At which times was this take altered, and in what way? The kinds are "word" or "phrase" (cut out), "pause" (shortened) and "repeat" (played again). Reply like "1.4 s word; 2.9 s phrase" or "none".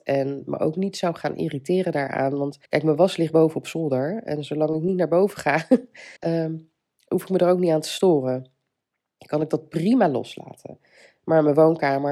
2.6 s pause; 6.2 s pause